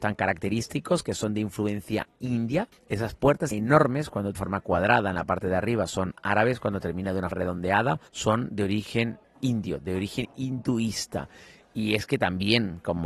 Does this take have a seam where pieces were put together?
yes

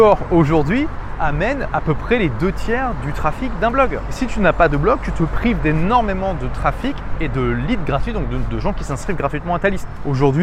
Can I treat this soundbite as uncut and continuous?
yes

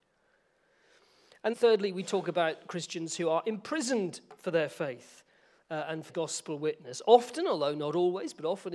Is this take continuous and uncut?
no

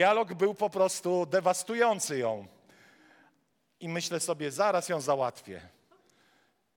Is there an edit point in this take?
no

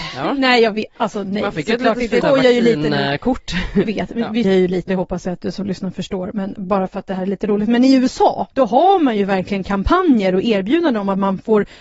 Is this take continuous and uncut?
no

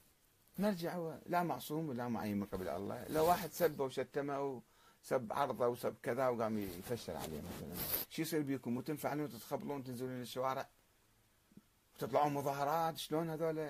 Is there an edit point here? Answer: no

